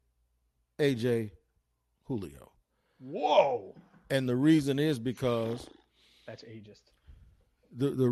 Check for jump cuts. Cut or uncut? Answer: uncut